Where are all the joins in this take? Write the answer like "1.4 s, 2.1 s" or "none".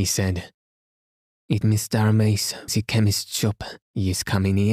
1.6 s, 2.7 s, 3.8 s